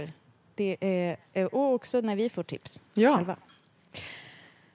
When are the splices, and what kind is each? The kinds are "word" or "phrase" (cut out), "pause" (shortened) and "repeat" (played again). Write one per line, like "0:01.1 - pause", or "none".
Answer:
none

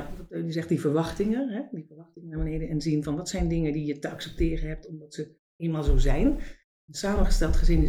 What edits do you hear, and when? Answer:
none

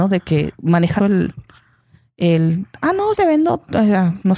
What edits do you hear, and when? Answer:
0:01.0 - word
0:03.1 - word

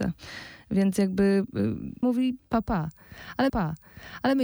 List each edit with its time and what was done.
0:02.0 - word
0:02.4 - word
0:03.5 - repeat

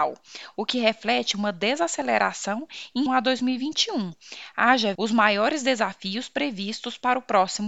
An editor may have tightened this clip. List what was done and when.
0:03.1 - word
0:05.0 - word

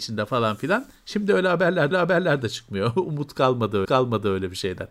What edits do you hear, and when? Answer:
0:01.9 - repeat
0:03.8 - repeat

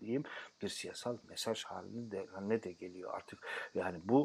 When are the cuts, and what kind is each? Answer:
none

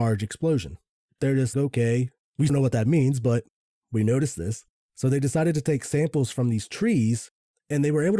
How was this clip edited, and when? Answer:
0:01.5 - word
0:02.5 - phrase
0:04.7 - pause

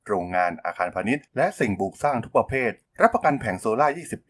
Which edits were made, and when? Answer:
0:01.3 - pause

